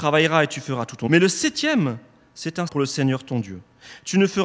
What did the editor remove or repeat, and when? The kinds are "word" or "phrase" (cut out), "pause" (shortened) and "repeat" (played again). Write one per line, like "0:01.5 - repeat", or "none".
0:01.1 - word
0:02.7 - word